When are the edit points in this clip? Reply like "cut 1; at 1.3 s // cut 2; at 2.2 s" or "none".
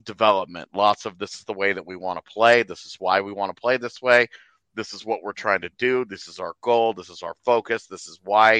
none